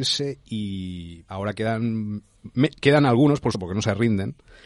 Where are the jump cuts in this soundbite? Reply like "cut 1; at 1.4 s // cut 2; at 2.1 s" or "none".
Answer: cut 1; at 1.3 s // cut 2; at 3.5 s